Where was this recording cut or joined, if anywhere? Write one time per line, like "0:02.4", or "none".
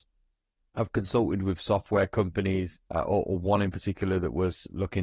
0:02.8